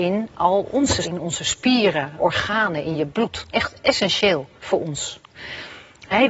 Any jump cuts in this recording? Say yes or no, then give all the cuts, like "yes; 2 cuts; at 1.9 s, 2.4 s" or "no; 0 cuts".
yes; 5 cuts; at 1.0 s, 2.2 s, 2.9 s, 3.5 s, 4.6 s